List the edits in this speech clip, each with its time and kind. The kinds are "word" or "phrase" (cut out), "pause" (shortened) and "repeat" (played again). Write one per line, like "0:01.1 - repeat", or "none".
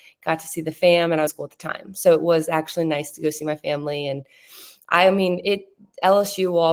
0:01.3 - phrase